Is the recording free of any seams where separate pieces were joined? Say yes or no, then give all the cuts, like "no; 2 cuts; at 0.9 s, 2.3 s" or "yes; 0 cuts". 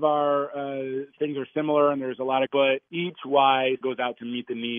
no; 2 cuts; at 2.5 s, 3.8 s